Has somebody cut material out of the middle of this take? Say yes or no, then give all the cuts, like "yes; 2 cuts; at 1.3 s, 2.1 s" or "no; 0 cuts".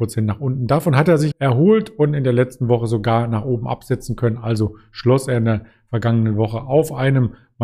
yes; 1 cut; at 1.3 s